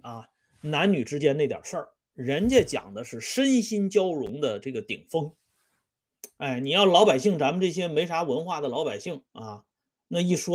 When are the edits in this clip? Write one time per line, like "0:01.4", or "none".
0:09.3